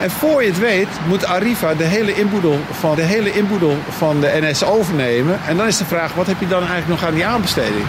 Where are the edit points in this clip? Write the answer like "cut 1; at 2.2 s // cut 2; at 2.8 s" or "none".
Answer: cut 1; at 3.0 s